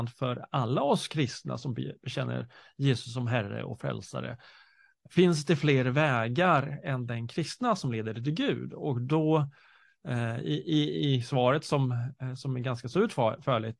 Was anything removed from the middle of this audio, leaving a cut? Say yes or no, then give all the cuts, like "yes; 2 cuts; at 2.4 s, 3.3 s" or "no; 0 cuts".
no; 0 cuts